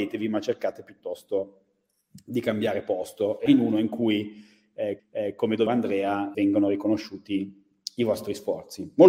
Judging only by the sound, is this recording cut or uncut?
cut